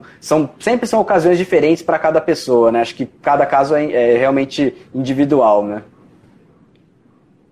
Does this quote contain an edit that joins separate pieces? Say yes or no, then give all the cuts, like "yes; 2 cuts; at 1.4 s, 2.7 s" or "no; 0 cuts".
no; 0 cuts